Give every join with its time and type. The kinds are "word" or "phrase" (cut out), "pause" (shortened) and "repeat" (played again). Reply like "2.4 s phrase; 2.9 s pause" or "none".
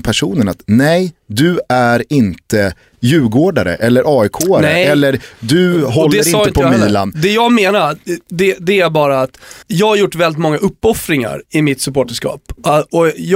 9.6 s pause